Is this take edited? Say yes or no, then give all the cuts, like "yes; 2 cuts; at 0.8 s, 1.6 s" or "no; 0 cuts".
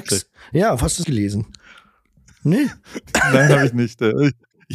yes; 1 cut; at 1.0 s